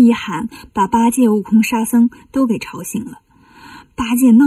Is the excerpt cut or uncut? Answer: uncut